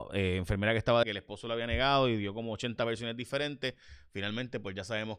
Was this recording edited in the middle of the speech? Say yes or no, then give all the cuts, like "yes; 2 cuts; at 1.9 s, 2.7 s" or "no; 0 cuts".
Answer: yes; 1 cut; at 1.0 s